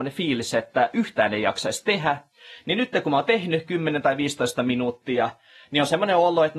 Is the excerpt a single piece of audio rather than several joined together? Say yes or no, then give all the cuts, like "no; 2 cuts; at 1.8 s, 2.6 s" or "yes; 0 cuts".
yes; 0 cuts